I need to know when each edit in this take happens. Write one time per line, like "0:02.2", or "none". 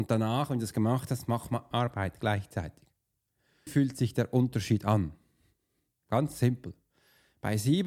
0:01.7
0:03.7